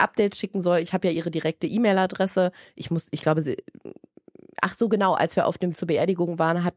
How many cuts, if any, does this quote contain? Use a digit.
1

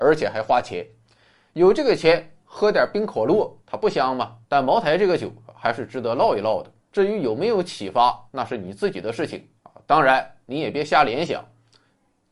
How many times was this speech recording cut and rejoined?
6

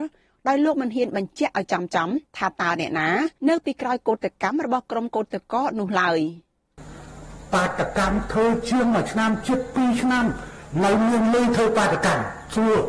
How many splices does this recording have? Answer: 2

